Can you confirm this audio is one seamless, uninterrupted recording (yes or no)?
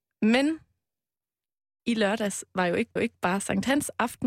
no